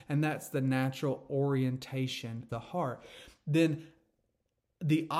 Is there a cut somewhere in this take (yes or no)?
yes